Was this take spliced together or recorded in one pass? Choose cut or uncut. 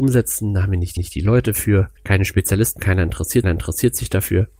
cut